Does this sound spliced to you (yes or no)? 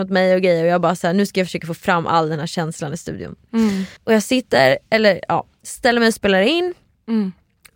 yes